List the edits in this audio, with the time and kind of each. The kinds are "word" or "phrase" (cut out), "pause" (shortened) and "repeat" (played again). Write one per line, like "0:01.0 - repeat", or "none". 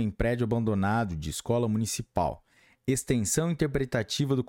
none